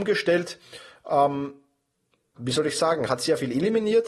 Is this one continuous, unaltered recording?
no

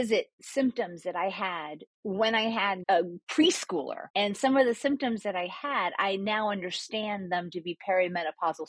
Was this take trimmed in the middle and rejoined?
yes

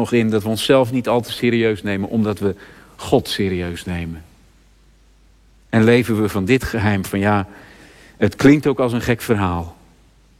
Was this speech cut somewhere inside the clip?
no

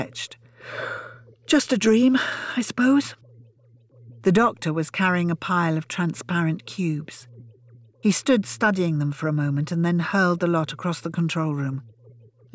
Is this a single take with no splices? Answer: yes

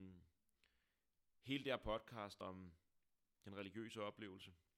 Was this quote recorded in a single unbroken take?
no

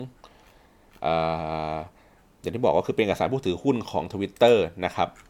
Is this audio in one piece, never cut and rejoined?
yes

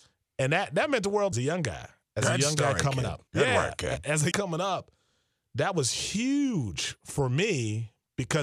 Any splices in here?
yes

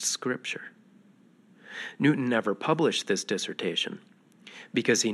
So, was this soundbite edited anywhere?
no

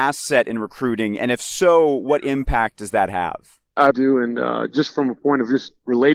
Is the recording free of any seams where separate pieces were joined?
no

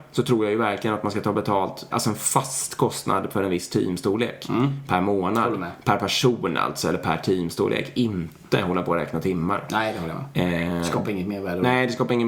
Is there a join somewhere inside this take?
yes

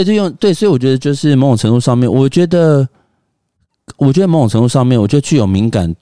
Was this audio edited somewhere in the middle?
no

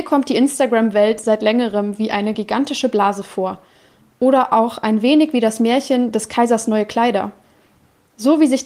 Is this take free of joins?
yes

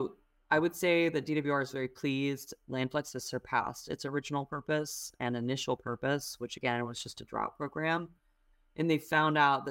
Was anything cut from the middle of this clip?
no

